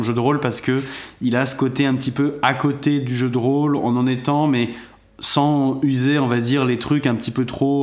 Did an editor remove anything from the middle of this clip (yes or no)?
no